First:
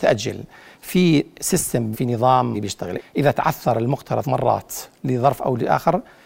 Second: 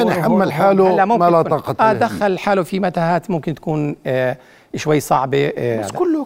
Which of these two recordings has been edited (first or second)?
first